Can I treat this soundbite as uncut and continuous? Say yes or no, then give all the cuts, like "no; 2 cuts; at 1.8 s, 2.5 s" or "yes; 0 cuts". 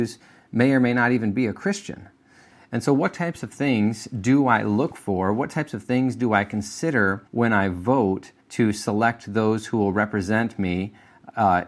no; 2 cuts; at 7.3 s, 8.4 s